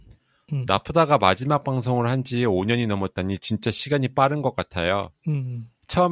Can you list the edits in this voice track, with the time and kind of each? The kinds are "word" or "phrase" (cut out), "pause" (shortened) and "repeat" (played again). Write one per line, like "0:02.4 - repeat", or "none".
none